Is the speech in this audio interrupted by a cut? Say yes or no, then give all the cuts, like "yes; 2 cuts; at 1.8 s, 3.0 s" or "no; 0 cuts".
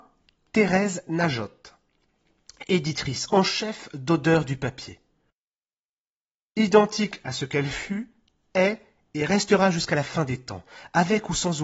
no; 0 cuts